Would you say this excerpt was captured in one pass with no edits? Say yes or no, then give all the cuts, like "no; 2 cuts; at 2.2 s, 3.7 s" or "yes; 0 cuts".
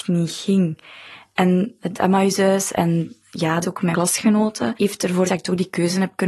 no; 5 cuts; at 1.8 s, 3.6 s, 3.9 s, 4.8 s, 5.3 s